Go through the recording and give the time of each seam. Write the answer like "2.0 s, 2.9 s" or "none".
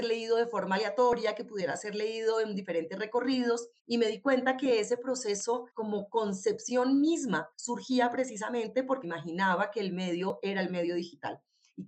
3.8 s, 5.7 s, 7.5 s, 9.0 s